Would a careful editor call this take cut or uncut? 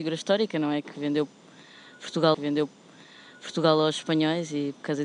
cut